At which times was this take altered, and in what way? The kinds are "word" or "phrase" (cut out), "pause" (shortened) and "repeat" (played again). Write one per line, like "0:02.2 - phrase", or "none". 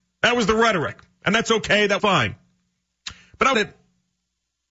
0:02.0 - word
0:03.5 - phrase